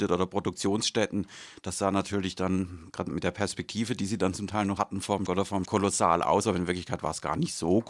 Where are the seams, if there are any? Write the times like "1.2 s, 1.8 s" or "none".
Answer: 4.8 s, 5.3 s, 5.6 s